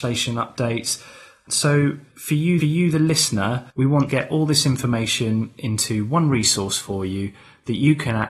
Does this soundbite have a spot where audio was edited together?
yes; 3 cuts; at 2.6 s, 3.7 s, 4.1 s

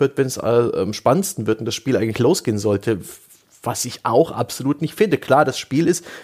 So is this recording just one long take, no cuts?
yes; 0 cuts

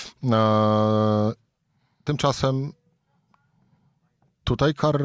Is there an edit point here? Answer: no; 0 cuts

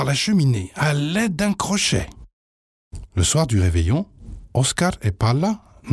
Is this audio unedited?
yes; 0 cuts

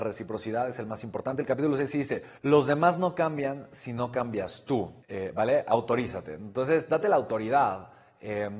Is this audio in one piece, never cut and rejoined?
no; 2 cuts; at 2.4 s, 5.0 s

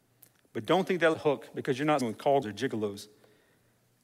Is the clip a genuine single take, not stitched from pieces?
no; 3 cuts; at 1.1 s, 2.0 s, 2.4 s

